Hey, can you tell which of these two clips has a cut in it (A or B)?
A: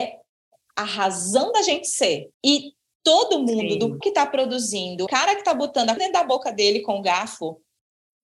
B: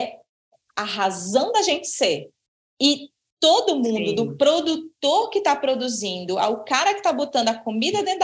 A